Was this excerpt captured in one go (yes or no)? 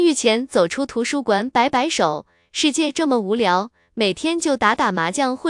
yes